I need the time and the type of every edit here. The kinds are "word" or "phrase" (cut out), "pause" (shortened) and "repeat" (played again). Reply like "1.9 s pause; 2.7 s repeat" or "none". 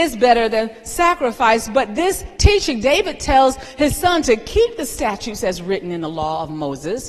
none